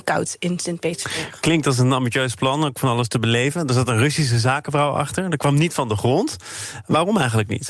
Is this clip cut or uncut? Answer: uncut